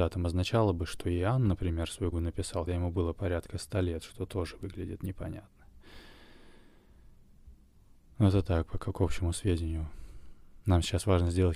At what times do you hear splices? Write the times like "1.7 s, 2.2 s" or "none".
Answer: 2.1 s, 2.7 s